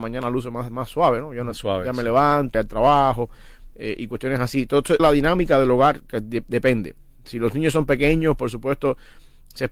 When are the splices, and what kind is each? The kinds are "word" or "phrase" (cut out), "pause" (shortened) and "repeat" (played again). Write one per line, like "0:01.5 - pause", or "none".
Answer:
0:02.5 - word
0:05.0 - word